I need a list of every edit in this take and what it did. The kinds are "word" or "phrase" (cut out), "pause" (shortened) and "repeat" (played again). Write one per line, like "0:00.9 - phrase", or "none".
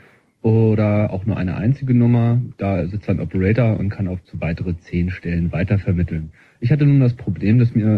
0:04.2 - word